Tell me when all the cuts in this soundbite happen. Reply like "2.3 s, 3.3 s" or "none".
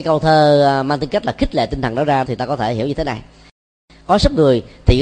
2.2 s